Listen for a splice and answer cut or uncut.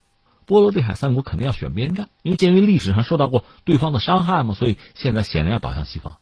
cut